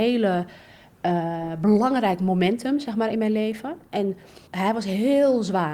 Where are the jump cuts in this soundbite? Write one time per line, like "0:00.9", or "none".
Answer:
0:04.5